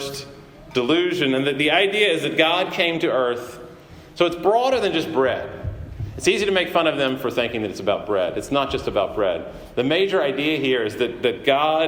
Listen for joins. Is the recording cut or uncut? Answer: uncut